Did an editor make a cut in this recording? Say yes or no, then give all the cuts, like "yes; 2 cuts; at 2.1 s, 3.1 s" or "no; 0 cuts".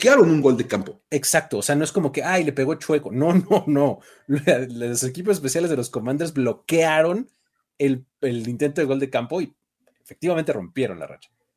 no; 0 cuts